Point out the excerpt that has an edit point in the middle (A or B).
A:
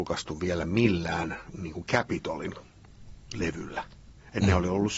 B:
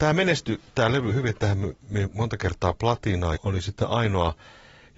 B